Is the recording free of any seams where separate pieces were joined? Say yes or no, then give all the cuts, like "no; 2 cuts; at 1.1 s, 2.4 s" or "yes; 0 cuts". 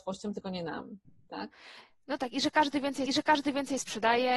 no; 3 cuts; at 1.0 s, 2.2 s, 3.1 s